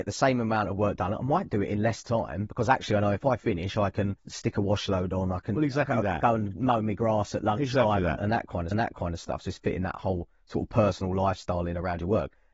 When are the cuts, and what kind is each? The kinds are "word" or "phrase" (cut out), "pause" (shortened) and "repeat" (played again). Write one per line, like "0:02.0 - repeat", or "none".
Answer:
0:04.2 - pause
0:08.7 - repeat